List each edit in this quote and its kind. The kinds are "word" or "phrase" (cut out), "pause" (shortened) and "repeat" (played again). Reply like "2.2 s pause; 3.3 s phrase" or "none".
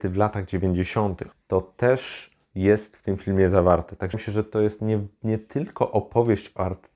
1.3 s phrase; 4.1 s word